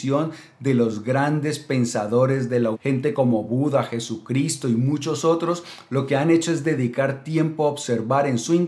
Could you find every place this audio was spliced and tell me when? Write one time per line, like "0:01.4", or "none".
0:02.7